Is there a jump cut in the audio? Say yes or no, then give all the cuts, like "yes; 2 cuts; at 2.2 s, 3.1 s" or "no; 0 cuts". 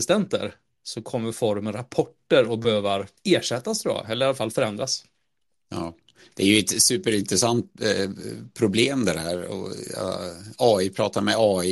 yes; 1 cut; at 3.2 s